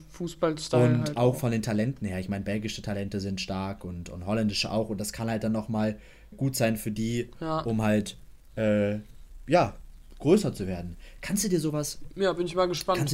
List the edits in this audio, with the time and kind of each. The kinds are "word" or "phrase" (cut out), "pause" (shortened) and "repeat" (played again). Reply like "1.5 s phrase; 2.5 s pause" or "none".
6.3 s word